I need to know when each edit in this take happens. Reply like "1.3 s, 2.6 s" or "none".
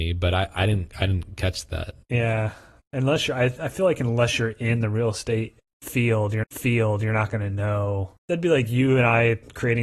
6.4 s, 8.2 s